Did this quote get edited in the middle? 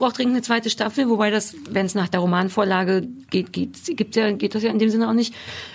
no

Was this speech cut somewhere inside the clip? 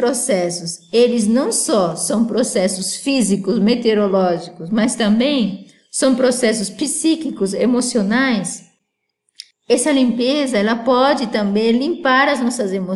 no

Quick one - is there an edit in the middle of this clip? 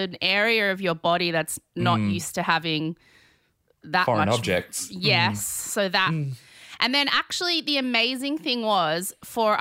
no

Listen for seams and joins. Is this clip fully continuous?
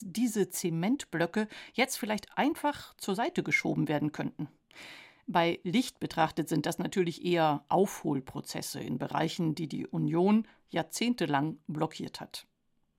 yes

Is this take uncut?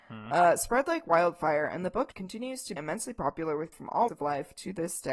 no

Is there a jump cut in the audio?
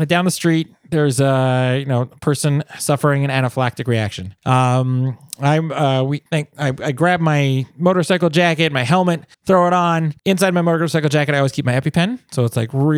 yes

